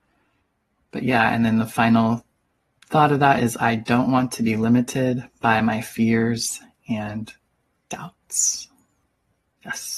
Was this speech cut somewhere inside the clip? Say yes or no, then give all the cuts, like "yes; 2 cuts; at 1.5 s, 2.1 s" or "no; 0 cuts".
no; 0 cuts